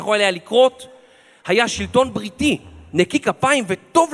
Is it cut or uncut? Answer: uncut